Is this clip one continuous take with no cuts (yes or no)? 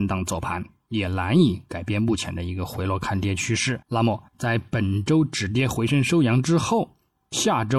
no